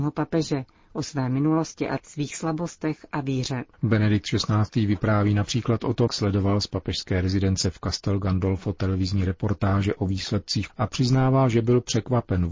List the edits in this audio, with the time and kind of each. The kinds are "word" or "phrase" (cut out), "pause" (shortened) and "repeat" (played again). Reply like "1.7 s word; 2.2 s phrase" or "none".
2.0 s word; 3.7 s pause; 6.1 s word; 10.7 s word